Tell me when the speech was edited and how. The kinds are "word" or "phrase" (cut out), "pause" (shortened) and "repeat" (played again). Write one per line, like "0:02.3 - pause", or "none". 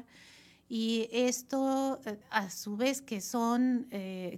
0:02.2 - pause